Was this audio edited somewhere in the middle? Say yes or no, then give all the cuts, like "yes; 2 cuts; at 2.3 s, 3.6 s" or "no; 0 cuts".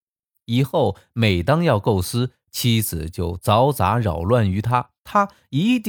yes; 1 cut; at 5.0 s